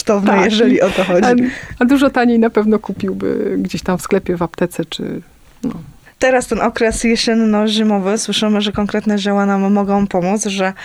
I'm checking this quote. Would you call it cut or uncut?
uncut